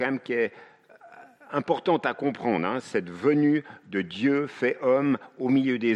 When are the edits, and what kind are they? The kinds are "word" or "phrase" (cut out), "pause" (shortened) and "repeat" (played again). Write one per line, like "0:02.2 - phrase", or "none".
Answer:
none